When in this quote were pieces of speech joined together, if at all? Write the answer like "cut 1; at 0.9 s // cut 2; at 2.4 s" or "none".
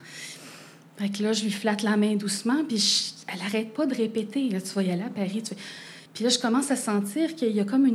cut 1; at 6.1 s